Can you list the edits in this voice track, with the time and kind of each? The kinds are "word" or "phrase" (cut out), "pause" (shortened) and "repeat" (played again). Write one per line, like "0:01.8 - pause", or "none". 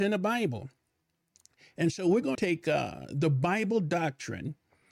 0:02.3 - word